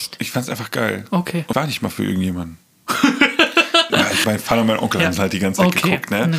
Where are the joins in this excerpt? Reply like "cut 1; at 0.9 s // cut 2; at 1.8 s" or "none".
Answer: cut 1; at 1.5 s // cut 2; at 3.9 s // cut 3; at 4.2 s